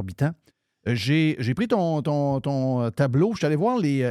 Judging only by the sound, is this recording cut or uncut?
uncut